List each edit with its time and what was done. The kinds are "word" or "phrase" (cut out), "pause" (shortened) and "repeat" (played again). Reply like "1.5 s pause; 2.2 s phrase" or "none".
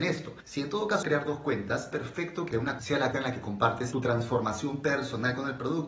1.0 s phrase; 1.9 s word; 2.8 s word; 3.1 s word